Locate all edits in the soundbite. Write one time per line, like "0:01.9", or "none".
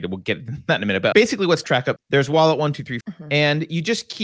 0:01.1
0:01.6
0:02.0
0:03.0